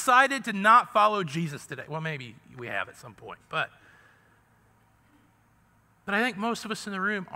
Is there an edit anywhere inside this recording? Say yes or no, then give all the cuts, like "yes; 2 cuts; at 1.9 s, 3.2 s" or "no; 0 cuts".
no; 0 cuts